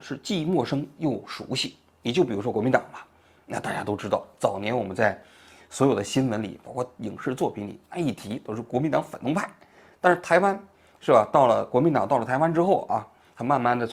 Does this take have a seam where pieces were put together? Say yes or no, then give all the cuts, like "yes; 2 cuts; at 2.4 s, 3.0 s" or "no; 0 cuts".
no; 0 cuts